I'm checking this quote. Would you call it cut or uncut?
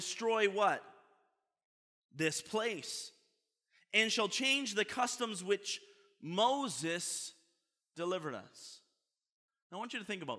uncut